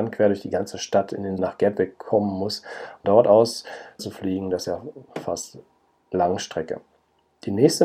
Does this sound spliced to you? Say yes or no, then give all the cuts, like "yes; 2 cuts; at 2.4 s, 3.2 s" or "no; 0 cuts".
yes; 6 cuts; at 1.4 s, 3.0 s, 4.0 s, 4.6 s, 5.1 s, 6.1 s